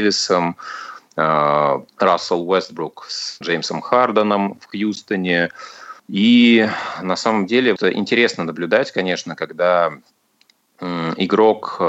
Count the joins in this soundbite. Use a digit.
4